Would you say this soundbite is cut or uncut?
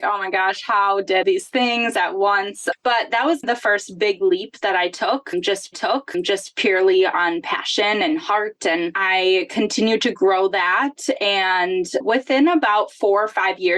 cut